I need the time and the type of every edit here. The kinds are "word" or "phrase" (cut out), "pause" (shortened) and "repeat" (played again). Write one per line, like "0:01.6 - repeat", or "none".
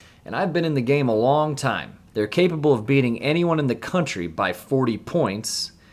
0:02.1 - pause

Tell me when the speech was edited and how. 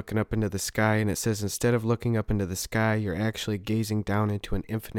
none

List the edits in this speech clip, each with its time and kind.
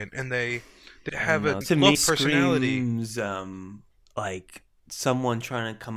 0:01.1 - word
0:01.6 - word
0:01.9 - word
0:04.0 - pause

